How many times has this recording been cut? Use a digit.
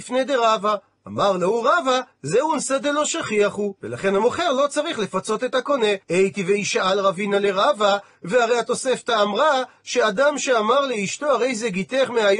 2